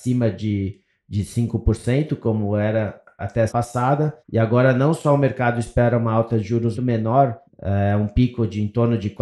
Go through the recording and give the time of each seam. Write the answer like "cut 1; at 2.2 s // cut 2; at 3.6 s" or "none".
cut 1; at 3.2 s // cut 2; at 3.5 s // cut 3; at 4.2 s // cut 4; at 6.7 s // cut 5; at 7.5 s